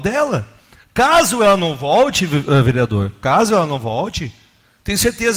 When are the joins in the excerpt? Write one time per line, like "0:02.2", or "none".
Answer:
none